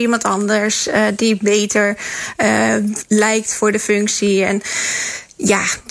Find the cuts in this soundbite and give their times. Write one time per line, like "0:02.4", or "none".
none